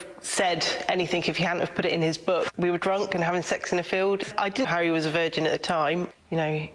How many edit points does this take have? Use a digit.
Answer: 1